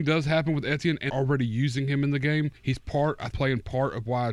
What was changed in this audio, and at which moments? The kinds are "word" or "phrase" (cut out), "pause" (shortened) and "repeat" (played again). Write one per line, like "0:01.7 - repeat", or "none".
0:01.1 - word
0:02.6 - pause
0:03.3 - word